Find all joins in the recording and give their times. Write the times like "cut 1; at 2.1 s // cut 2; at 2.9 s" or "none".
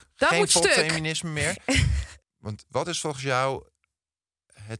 none